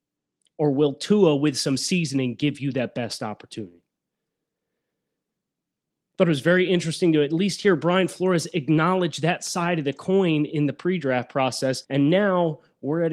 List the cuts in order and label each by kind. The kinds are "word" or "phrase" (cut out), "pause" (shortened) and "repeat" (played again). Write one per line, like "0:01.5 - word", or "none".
0:11.8 - pause